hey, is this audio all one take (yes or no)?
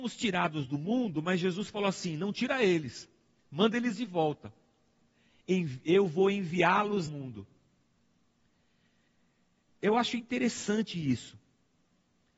no